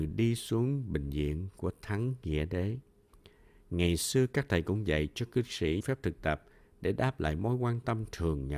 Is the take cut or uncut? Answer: cut